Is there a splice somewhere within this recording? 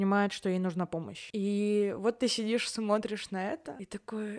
no; 0 cuts

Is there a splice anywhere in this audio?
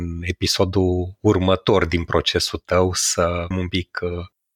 yes; 1 cut; at 3.5 s

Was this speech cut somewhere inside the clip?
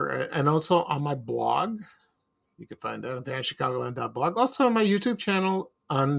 no; 0 cuts

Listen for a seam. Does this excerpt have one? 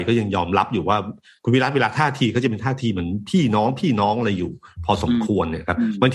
no; 0 cuts

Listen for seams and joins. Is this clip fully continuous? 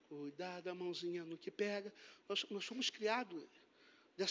yes; 0 cuts

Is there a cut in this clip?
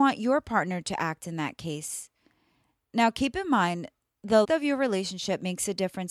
yes; 1 cut; at 4.4 s

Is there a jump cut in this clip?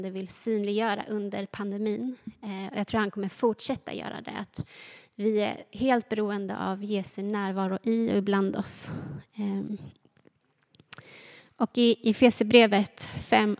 no; 0 cuts

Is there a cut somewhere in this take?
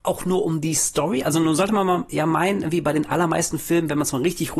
no; 0 cuts

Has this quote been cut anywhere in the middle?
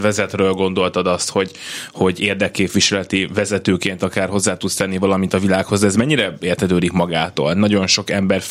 no; 0 cuts

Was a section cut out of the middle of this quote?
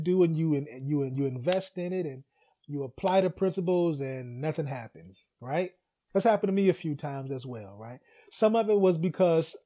no; 0 cuts

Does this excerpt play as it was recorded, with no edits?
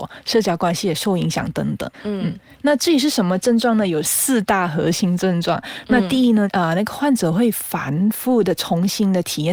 no; 1 cut; at 1.9 s

